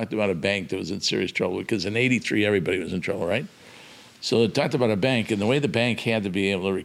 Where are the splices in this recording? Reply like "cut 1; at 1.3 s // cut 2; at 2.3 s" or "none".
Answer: none